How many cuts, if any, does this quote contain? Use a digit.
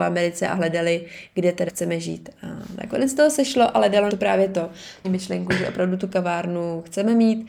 3